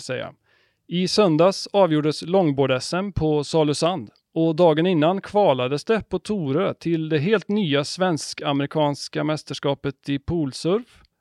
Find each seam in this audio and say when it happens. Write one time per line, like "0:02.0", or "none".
none